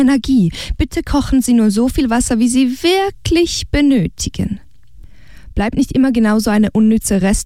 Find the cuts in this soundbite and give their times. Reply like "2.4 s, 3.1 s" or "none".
none